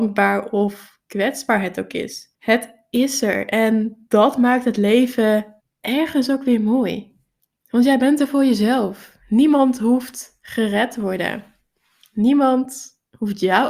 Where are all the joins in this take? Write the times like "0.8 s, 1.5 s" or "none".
2.3 s, 5.6 s, 7.4 s